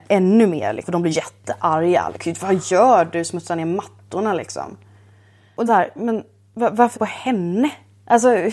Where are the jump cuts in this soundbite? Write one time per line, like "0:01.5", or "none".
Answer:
0:01.1
0:05.7
0:06.9

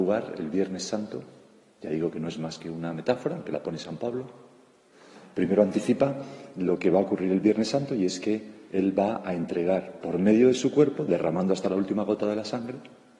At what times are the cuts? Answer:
none

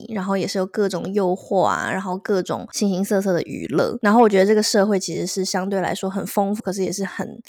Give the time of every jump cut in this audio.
0:06.6

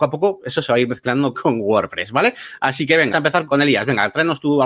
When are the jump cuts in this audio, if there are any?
0:01.3
0:03.1
0:03.5

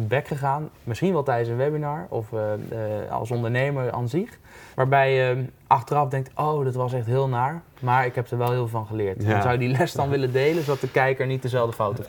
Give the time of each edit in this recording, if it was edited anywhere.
0:04.7

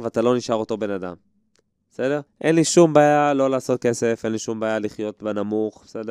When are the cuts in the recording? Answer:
0:02.3

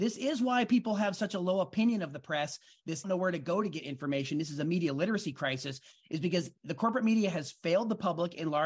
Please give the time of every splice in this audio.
0:03.0

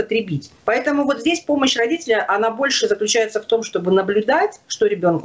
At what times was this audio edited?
none

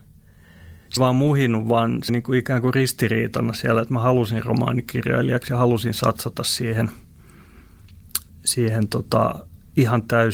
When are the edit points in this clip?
0:01.0
0:02.1
0:08.3

